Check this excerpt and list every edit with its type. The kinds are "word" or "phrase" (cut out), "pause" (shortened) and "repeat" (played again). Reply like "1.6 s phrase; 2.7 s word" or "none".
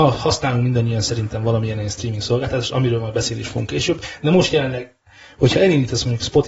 none